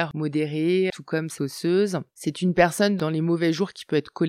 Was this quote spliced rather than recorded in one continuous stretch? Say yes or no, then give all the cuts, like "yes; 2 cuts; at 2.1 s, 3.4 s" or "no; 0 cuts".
yes; 1 cut; at 1.4 s